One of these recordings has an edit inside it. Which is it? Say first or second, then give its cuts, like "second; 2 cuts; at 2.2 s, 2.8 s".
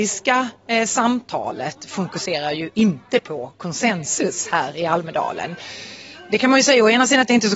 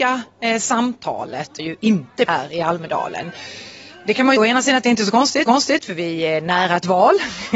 second; 4 cuts; at 1.6 s, 2.3 s, 4.4 s, 5.5 s